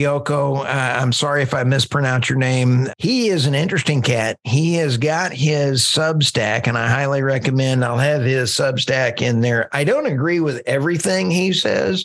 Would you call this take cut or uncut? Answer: uncut